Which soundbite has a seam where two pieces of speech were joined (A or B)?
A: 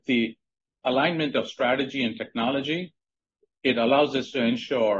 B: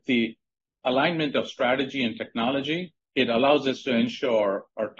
B